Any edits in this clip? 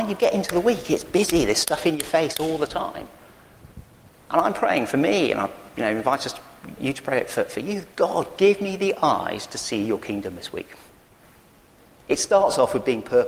no; 0 cuts

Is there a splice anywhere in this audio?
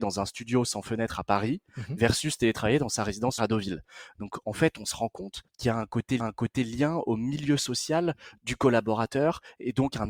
yes; 3 cuts; at 3.4 s, 5.5 s, 6.2 s

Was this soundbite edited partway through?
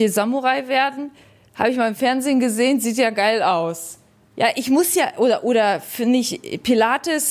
no; 0 cuts

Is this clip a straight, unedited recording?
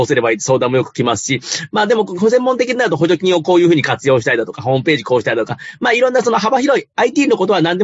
yes; 0 cuts

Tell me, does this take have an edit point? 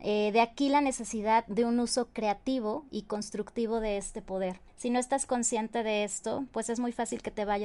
yes; 1 cut; at 4.7 s

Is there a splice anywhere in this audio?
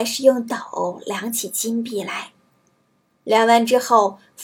no; 0 cuts

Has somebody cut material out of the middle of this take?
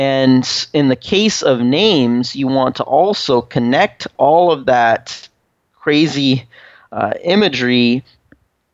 no; 0 cuts

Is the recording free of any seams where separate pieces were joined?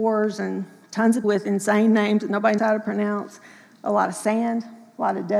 no; 2 cuts; at 1.2 s, 2.6 s

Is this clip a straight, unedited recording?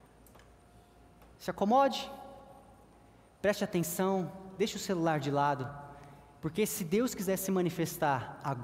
yes; 0 cuts

